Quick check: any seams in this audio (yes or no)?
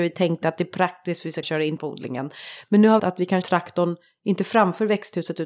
yes